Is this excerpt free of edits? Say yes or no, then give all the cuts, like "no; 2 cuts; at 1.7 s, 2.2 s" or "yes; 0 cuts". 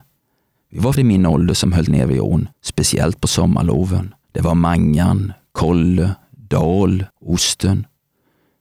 no; 5 cuts; at 1.0 s, 1.9 s, 2.5 s, 4.2 s, 7.1 s